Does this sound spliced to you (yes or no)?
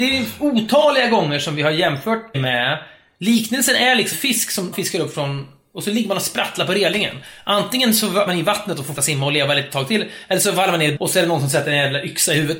yes